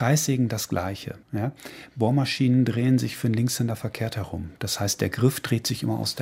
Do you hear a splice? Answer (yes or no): yes